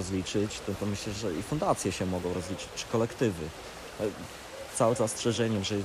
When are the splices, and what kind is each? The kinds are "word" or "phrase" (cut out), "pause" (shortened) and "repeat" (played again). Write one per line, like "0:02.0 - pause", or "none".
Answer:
0:01.2 - word
0:05.0 - word